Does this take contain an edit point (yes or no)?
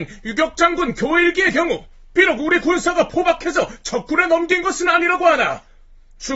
yes